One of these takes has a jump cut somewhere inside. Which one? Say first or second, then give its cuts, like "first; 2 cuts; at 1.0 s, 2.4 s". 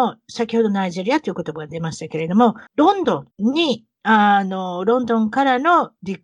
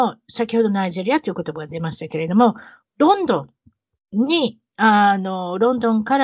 first; 2 cuts; at 2.7 s, 3.3 s